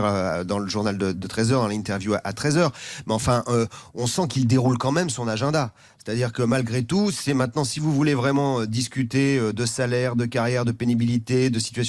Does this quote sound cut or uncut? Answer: uncut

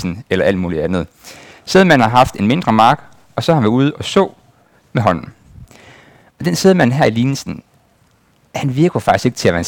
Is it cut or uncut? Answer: uncut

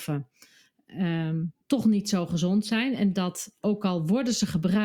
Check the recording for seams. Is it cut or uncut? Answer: cut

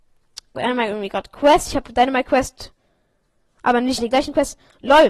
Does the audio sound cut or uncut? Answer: cut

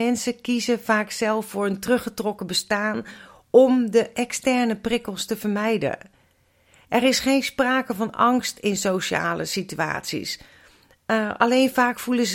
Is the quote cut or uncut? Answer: uncut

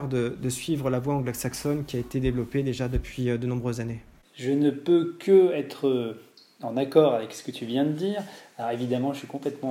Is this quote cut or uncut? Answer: uncut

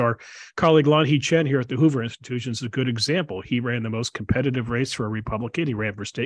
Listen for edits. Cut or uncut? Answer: uncut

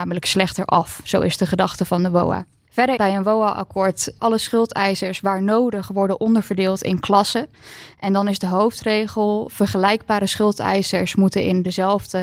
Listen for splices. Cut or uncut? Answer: cut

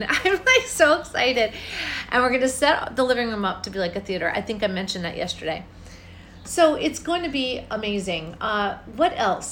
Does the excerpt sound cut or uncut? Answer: uncut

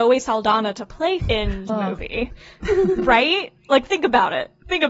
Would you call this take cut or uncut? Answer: cut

